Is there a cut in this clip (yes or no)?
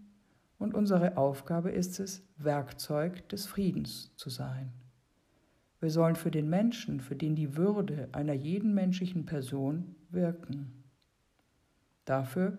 no